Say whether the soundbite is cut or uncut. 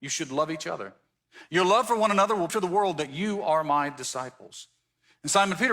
cut